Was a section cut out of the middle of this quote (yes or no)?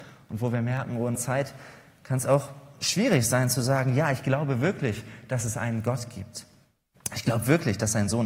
yes